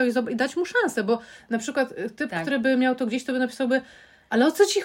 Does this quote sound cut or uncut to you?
uncut